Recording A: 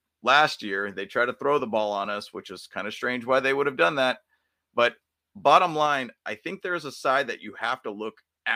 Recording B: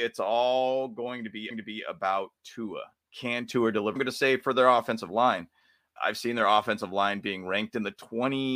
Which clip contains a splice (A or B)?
B